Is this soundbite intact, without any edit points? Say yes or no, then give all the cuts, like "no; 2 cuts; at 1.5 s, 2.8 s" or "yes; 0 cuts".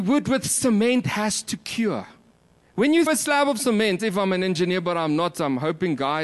no; 4 cuts; at 1.0 s, 2.3 s, 3.1 s, 4.0 s